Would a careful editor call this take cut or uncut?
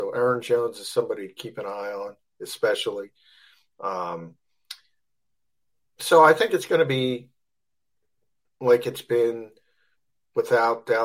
uncut